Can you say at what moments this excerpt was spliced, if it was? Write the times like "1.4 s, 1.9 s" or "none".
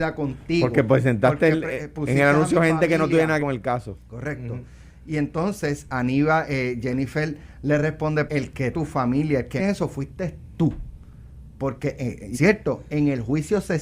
3.4 s, 5.9 s, 8.3 s, 8.7 s, 9.6 s, 12.3 s

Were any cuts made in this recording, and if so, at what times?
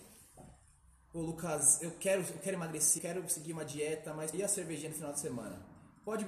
3.0 s, 4.3 s

